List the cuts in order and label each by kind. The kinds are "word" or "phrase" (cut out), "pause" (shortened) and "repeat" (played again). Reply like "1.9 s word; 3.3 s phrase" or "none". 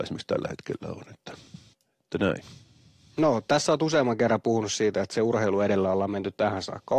1.7 s pause